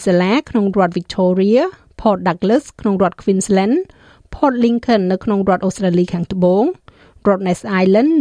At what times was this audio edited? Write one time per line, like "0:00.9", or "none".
none